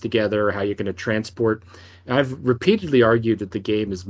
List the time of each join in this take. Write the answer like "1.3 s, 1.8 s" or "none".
none